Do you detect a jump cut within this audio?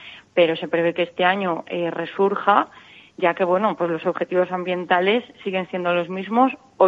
no; 0 cuts

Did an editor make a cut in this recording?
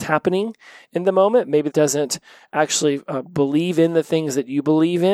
yes; 1 cut; at 1.7 s

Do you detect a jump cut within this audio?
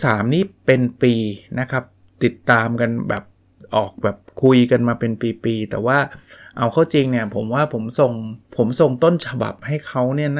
yes; 1 cut; at 8.5 s

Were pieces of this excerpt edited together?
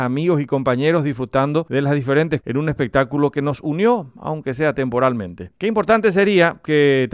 yes; 1 cut; at 2.4 s

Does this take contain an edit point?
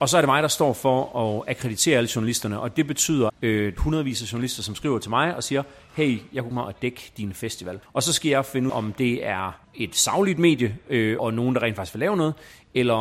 yes; 7 cuts; at 3.3 s, 3.8 s, 6.5 s, 7.8 s, 8.7 s, 9.6 s, 11.2 s

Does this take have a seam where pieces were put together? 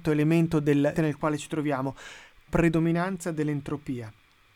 yes; 2 cuts; at 0.9 s, 2.5 s

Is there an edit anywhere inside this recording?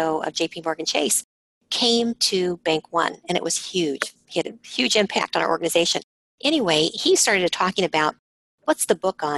no; 0 cuts

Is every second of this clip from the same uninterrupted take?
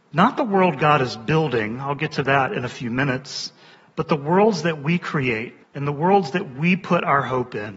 no; 2 cuts; at 3.7 s, 5.6 s

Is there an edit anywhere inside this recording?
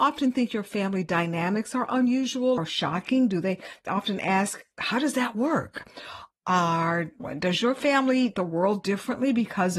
yes; 4 cuts; at 2.6 s, 3.9 s, 7.2 s, 8.3 s

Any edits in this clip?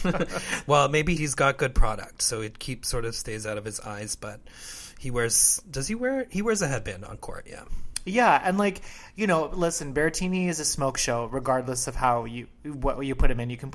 yes; 1 cut; at 1.2 s

